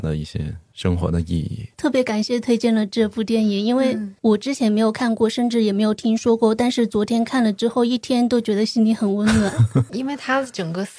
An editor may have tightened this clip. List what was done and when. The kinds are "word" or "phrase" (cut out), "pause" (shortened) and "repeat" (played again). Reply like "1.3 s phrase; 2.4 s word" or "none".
9.9 s word